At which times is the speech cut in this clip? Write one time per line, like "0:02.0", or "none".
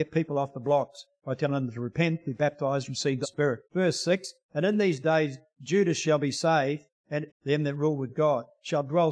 0:03.2
0:03.6
0:07.3